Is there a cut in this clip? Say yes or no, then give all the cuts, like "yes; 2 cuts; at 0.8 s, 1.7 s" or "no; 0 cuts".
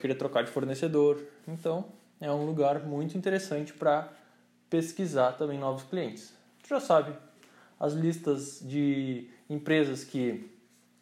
no; 0 cuts